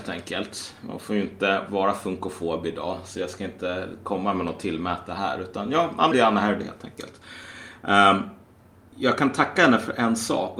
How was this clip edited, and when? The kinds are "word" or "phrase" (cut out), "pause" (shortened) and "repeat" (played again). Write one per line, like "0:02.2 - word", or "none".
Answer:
0:06.1 - word
0:08.9 - word